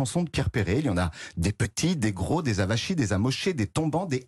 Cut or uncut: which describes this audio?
uncut